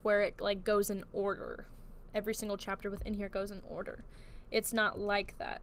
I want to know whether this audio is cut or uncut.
uncut